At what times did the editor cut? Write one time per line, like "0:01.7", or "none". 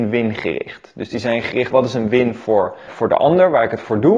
0:01.7
0:02.9